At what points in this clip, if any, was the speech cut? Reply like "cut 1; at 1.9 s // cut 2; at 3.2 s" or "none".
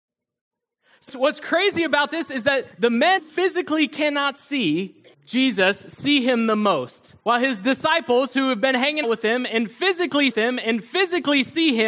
cut 1; at 1.1 s // cut 2; at 2.7 s // cut 3; at 3.2 s // cut 4; at 5.1 s // cut 5; at 7.2 s // cut 6; at 9.0 s // cut 7; at 10.3 s